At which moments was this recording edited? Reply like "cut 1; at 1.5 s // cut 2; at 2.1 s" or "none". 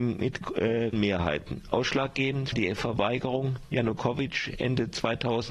cut 1; at 0.9 s // cut 2; at 2.5 s